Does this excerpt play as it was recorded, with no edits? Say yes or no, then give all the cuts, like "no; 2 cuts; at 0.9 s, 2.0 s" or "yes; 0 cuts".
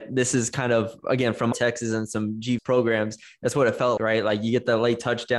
no; 3 cuts; at 1.5 s, 2.6 s, 4.0 s